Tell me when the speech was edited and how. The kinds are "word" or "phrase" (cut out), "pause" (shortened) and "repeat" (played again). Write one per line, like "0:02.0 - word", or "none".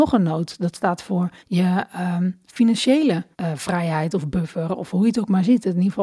0:01.4 - pause
0:03.3 - pause